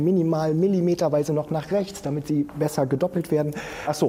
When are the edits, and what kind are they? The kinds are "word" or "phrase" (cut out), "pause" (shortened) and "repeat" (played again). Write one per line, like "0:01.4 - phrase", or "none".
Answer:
none